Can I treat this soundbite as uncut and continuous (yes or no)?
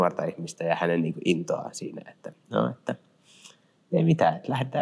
yes